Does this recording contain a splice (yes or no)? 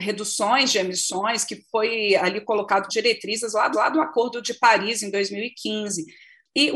yes